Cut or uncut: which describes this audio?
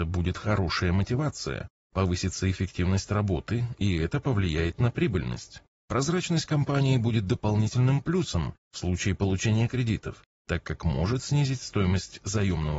uncut